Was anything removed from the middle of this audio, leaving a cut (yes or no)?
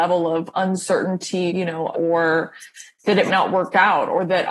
yes